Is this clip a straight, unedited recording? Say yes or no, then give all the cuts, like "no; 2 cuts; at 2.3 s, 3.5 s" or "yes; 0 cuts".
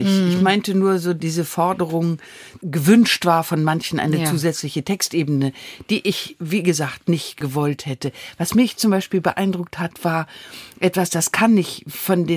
yes; 0 cuts